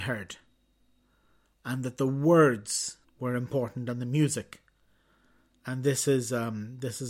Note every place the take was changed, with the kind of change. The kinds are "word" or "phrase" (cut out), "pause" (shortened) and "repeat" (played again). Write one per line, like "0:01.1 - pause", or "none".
0:03.0 - pause